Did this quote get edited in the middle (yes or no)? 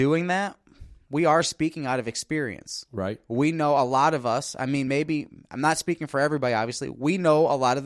no